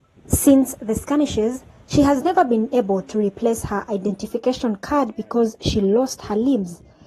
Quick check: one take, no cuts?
yes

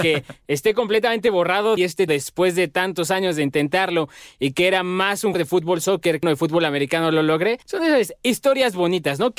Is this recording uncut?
no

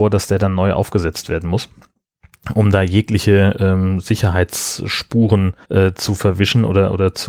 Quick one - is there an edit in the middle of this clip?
yes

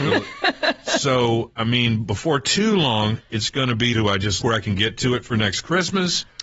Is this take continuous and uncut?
no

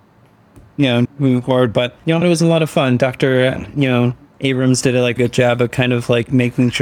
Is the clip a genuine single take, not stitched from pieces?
no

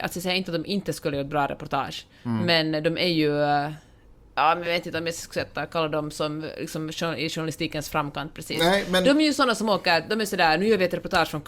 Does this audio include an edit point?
no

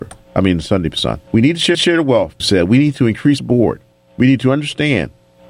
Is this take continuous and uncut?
no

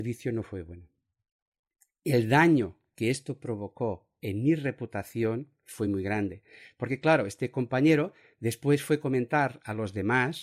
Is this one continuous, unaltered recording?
yes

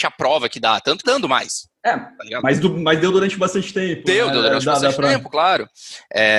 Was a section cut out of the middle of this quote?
yes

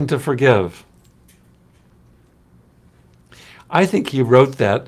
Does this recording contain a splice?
no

